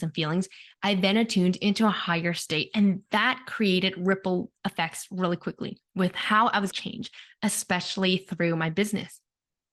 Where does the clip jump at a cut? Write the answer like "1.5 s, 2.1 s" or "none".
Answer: 5.8 s, 6.7 s